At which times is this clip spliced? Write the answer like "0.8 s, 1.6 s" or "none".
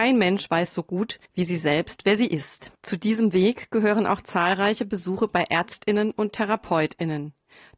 1.3 s, 2.7 s